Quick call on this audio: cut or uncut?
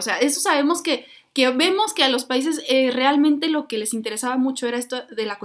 uncut